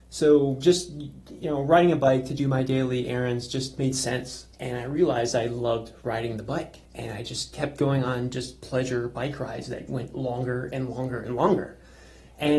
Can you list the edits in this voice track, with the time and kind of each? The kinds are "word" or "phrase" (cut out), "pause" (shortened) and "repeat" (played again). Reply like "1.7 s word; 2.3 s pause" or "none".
4.5 s pause; 6.8 s pause